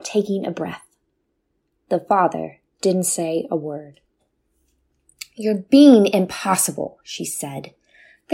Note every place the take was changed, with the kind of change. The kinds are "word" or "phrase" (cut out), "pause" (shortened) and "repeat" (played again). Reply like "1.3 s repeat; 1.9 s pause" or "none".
none